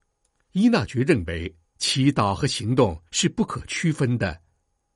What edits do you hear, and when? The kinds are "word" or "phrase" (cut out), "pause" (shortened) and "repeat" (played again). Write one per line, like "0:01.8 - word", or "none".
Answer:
0:01.6 - pause
0:03.1 - pause